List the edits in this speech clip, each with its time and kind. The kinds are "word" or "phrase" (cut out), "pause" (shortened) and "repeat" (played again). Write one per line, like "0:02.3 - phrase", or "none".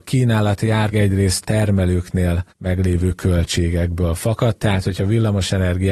0:00.9 - word
0:01.4 - phrase
0:02.5 - pause